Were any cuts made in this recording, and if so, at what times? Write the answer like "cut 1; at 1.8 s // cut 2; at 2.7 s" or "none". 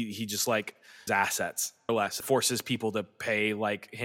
cut 1; at 1.1 s // cut 2; at 1.9 s // cut 3; at 2.2 s